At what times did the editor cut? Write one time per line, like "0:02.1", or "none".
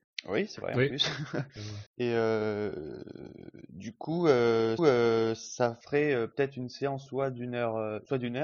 0:01.9
0:04.8